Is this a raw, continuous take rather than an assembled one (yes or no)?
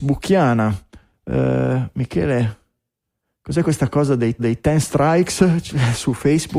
no